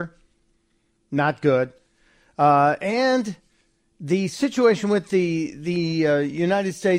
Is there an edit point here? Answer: no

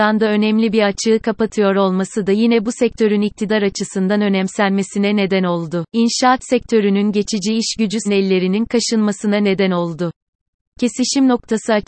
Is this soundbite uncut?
no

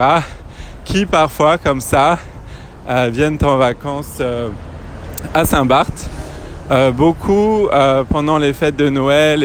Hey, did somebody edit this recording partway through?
no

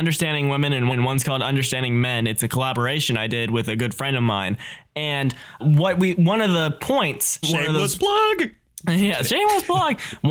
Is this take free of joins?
no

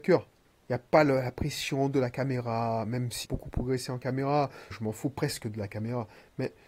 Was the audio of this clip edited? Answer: yes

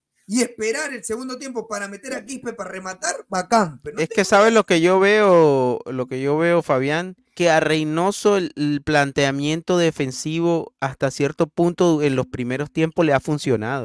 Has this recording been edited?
yes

